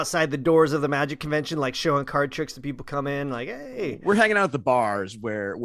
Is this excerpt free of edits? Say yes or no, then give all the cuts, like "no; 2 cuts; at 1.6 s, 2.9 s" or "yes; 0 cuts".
yes; 0 cuts